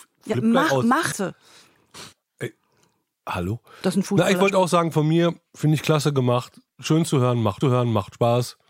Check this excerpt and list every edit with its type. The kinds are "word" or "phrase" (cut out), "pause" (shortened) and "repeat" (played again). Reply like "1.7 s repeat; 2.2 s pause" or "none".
1.1 s word; 5.5 s pause; 7.6 s repeat